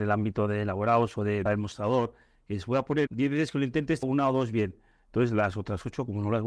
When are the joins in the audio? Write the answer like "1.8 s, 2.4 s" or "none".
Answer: 1.4 s, 3.1 s, 4.0 s